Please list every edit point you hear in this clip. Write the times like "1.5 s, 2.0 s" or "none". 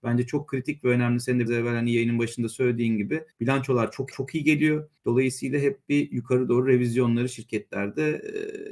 1.5 s, 3.3 s, 4.1 s, 5.0 s

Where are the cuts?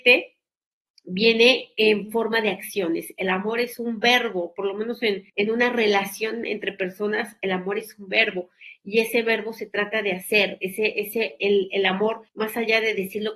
5.3 s, 12.3 s

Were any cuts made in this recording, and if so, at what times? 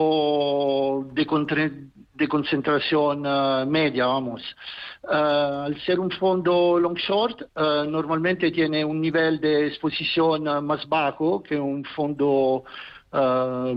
none

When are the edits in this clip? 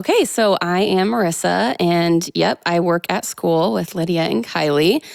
none

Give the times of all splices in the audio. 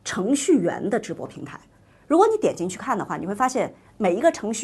none

